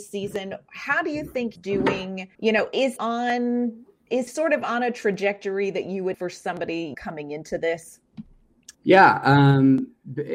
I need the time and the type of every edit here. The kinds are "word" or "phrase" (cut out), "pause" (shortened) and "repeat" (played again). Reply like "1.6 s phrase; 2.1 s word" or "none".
1.6 s word; 2.3 s pause; 3.0 s word; 4.3 s word; 6.1 s word; 6.9 s word; 8.7 s pause